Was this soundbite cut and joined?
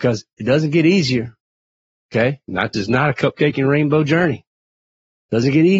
yes; 1 cut; at 2.7 s

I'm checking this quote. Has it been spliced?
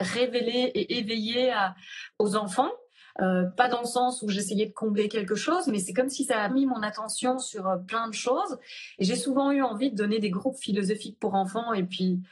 yes; 1 cut; at 6.5 s

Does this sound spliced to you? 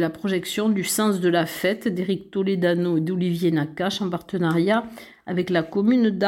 no; 0 cuts

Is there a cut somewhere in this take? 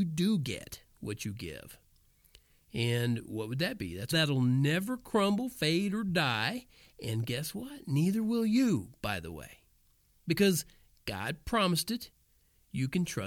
yes; 1 cut; at 4.1 s

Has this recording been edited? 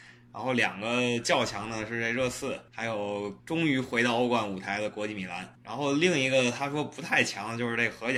yes; 2 cuts; at 2.7 s, 3.4 s

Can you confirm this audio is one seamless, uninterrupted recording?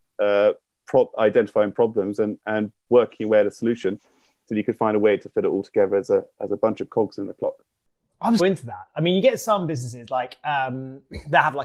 no; 1 cut; at 8.4 s

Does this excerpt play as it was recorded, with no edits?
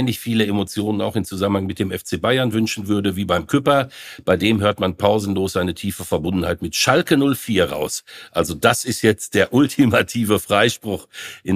yes; 0 cuts

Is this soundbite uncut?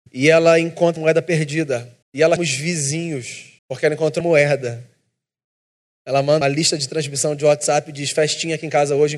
no; 6 cuts; at 1.0 s, 2.0 s, 2.4 s, 3.6 s, 4.2 s, 6.4 s

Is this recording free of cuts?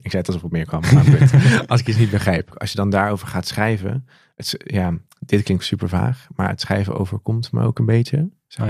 no; 1 cut; at 5.6 s

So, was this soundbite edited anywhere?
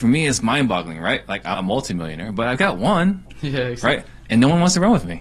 yes; 1 cut; at 1.5 s

